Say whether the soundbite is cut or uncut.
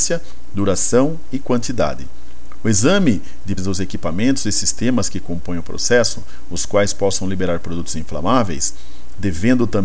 cut